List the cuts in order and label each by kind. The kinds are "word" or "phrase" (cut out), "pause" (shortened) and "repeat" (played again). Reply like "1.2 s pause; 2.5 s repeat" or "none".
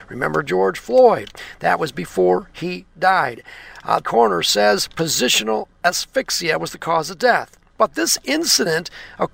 4.0 s word